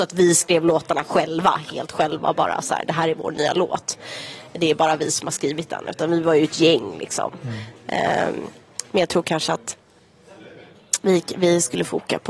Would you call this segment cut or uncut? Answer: uncut